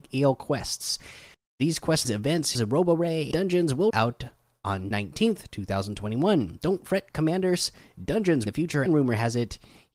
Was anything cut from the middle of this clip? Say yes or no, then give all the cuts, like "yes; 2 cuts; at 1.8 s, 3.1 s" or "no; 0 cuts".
yes; 8 cuts; at 1.3 s, 2.0 s, 2.5 s, 3.3 s, 3.9 s, 4.9 s, 8.5 s, 8.9 s